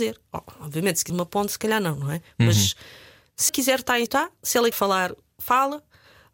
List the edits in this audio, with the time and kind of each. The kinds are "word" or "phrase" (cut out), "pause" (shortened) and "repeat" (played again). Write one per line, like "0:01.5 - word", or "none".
0:01.1 - word
0:03.5 - word
0:04.1 - word
0:04.7 - word